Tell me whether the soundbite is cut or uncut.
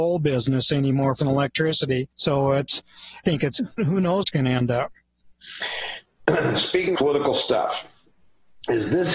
cut